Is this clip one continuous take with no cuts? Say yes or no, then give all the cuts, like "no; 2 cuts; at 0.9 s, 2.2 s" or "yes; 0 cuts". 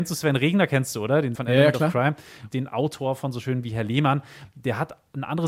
no; 3 cuts; at 1.3 s, 2.5 s, 3.6 s